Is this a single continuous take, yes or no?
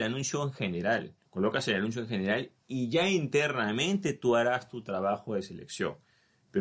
no